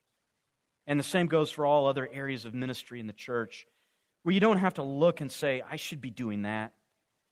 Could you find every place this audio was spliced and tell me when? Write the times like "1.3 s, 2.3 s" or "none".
none